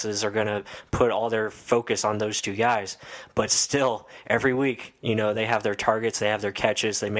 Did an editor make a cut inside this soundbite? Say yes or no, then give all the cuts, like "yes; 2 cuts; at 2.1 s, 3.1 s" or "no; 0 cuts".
no; 0 cuts